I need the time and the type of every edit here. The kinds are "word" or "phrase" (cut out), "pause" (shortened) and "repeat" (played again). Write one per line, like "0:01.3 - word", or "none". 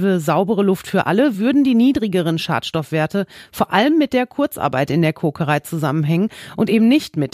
none